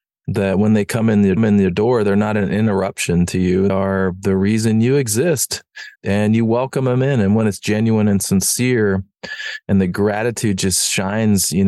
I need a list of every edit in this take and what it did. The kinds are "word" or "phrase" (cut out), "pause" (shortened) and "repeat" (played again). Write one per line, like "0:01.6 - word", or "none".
0:01.4 - repeat
0:03.7 - word
0:06.0 - pause